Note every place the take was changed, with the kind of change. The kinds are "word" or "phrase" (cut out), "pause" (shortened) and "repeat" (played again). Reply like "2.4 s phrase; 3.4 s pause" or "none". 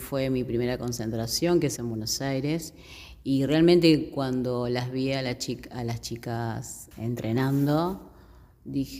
1.8 s word; 6.9 s word